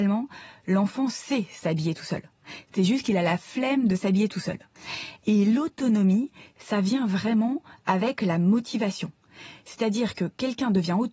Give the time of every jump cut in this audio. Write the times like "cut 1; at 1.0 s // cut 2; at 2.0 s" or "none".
none